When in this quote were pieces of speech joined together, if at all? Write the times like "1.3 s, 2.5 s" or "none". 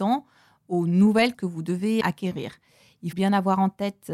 1.3 s, 2.0 s, 3.1 s